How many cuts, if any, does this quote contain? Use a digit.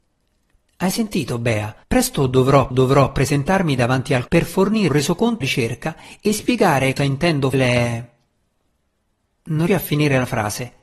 8